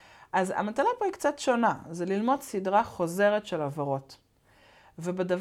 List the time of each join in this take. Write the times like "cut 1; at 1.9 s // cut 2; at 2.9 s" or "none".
none